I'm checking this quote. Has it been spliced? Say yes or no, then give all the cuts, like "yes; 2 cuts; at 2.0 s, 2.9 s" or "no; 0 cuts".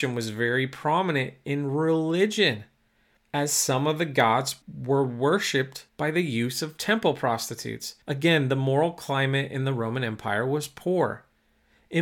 yes; 4 cuts; at 3.2 s, 4.6 s, 5.9 s, 8.0 s